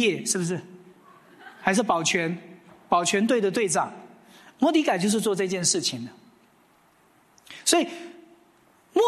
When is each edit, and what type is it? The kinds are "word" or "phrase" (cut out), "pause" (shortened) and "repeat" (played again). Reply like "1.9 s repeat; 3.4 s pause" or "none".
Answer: none